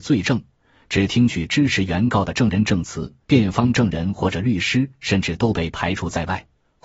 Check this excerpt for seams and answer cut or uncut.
cut